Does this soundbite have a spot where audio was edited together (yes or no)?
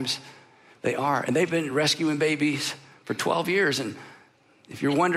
no